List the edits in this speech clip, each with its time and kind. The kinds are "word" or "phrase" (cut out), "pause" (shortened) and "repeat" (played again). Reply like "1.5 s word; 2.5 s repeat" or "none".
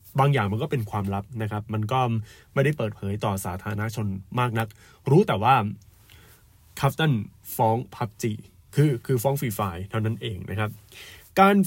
none